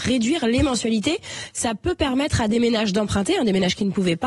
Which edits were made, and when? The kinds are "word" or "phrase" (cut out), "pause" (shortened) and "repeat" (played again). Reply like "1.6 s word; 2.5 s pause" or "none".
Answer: none